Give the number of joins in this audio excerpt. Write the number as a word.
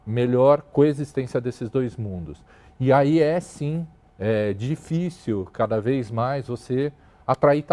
zero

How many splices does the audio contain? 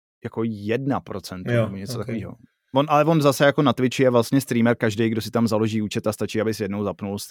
zero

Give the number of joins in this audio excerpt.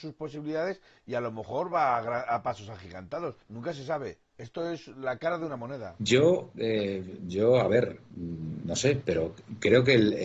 one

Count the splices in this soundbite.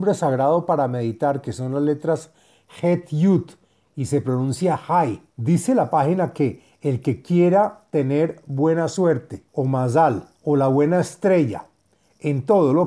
three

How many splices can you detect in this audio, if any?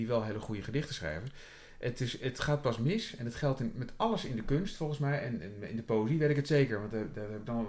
zero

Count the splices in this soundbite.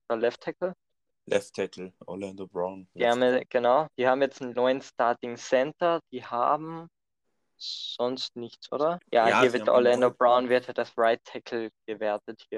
six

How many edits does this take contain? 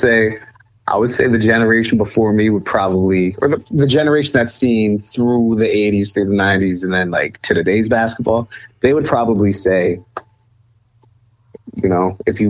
zero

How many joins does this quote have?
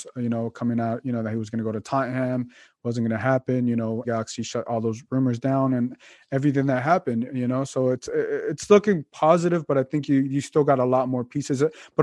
one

